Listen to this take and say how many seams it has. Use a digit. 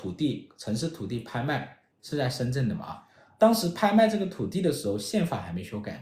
0